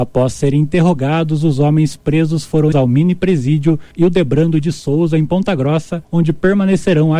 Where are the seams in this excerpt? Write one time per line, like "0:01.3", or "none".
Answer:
0:02.7
0:03.9
0:06.0